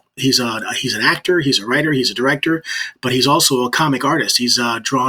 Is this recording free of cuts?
yes; 0 cuts

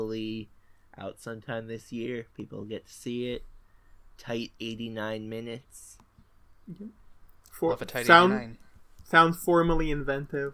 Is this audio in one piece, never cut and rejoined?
yes; 0 cuts

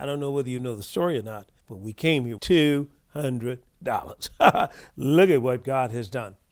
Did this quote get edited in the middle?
yes; 2 cuts; at 1.6 s, 2.4 s

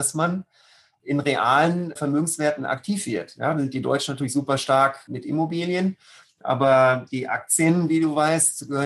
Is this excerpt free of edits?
yes; 0 cuts

